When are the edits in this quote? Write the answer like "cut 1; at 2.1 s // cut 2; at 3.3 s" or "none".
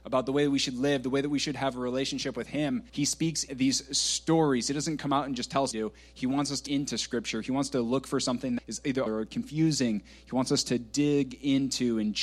cut 1; at 2.9 s // cut 2; at 3.5 s // cut 3; at 5.7 s // cut 4; at 6.7 s // cut 5; at 8.6 s // cut 6; at 9.1 s